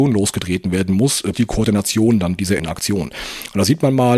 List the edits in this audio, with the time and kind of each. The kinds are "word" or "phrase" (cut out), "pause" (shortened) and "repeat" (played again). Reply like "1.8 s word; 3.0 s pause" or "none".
1.3 s word; 2.6 s word